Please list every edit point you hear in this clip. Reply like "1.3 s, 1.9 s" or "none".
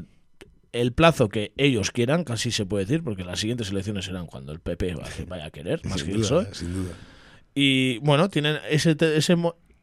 none